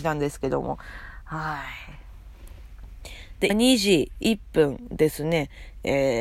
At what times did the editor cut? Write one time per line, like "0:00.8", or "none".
0:03.5

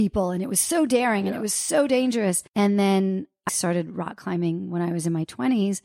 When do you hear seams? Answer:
0:02.5
0:03.5

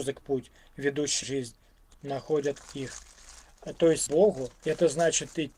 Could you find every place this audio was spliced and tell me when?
0:01.2
0:01.9
0:04.1
0:04.6

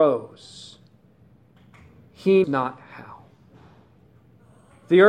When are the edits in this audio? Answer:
0:02.4

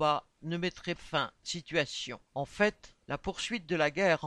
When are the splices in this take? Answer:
0:01.0
0:01.4
0:02.3
0:03.0

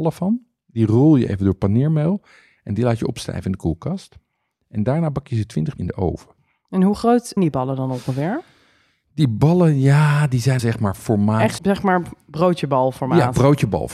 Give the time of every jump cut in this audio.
0:05.8
0:07.4
0:10.6
0:11.6

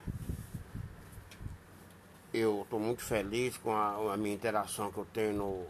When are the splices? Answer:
none

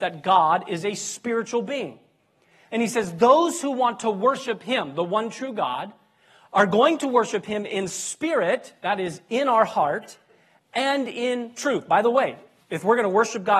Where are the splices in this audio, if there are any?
none

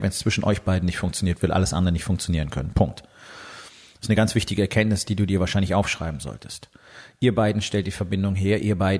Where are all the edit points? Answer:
none

